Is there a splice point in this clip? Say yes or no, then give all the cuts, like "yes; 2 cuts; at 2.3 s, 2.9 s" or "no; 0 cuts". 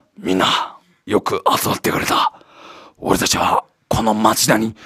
no; 0 cuts